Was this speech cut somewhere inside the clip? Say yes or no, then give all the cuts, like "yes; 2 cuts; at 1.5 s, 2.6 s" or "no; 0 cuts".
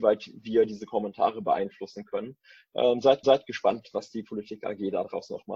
yes; 1 cut; at 3.2 s